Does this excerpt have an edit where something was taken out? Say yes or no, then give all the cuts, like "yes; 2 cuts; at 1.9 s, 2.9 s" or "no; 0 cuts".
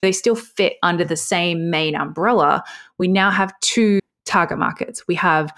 no; 0 cuts